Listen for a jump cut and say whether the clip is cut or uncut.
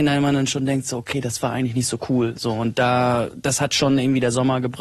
uncut